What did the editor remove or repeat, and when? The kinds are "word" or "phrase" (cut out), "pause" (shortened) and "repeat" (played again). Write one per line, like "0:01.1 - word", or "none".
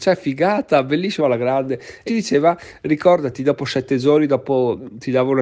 0:01.2 - word
0:02.1 - word